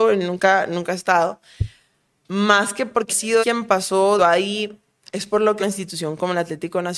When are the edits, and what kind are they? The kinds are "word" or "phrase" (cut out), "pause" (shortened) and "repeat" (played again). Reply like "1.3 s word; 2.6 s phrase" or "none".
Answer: 3.1 s word; 3.4 s word; 4.2 s word; 5.6 s word